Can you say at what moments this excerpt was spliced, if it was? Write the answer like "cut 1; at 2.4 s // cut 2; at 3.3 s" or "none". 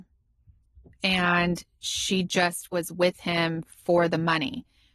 none